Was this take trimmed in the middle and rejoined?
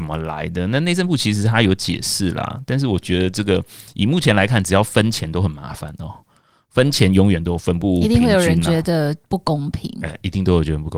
no; 0 cuts

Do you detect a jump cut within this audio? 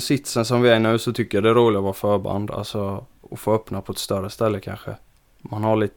no; 0 cuts

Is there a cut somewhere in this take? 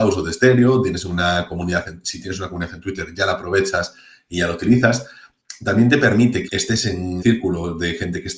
yes; 2 cuts; at 6.5 s, 7.2 s

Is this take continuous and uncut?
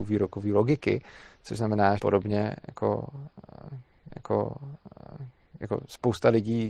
no; 2 cuts; at 2.0 s, 4.1 s

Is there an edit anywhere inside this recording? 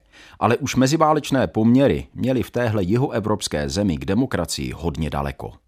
no; 0 cuts

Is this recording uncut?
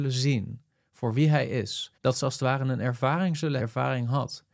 no; 2 cuts; at 1.9 s, 3.6 s

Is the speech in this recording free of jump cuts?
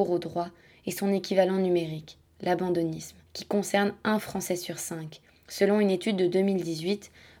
no; 1 cut; at 3.3 s

